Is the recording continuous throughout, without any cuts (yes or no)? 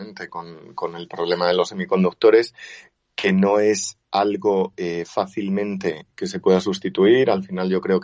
yes